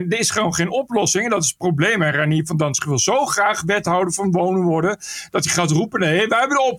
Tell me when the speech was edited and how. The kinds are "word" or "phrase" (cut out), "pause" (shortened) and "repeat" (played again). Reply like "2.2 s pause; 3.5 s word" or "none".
none